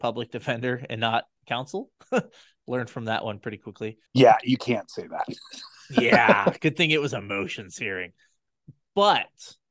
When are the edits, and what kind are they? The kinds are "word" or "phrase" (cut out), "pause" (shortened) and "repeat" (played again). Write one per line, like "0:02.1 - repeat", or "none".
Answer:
0:04.1 - pause